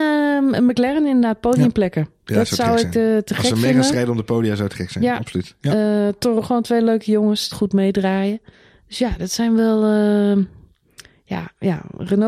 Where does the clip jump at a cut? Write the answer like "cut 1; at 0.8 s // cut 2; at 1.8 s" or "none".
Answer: cut 1; at 6.4 s // cut 2; at 7.5 s // cut 3; at 8.5 s